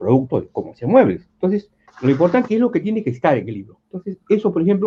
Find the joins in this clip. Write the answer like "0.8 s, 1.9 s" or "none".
1.9 s, 2.5 s, 3.8 s